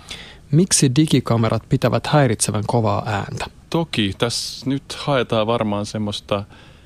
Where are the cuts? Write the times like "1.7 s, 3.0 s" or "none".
none